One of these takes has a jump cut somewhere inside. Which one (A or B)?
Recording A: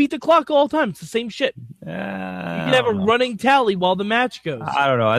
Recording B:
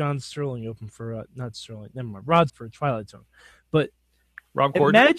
B